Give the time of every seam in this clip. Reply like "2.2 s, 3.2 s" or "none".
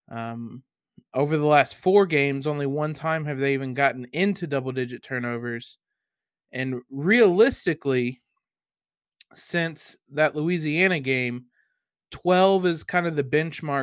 none